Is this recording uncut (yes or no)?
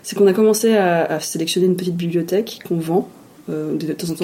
yes